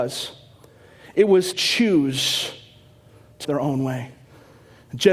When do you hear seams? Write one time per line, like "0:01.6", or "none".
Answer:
0:01.5
0:03.4